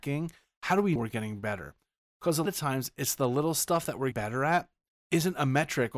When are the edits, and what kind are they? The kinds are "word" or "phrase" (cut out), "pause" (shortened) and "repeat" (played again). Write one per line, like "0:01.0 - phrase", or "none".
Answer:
0:01.0 - word
0:02.5 - word
0:04.1 - word
0:05.0 - word